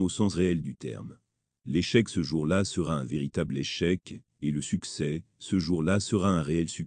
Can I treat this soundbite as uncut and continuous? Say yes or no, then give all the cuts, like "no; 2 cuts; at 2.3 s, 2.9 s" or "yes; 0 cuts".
yes; 0 cuts